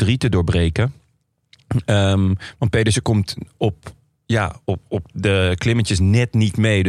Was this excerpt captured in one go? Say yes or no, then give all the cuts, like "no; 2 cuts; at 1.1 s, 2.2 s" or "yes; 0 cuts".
yes; 0 cuts